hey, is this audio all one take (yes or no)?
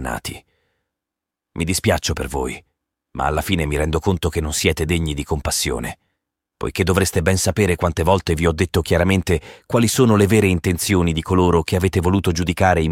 yes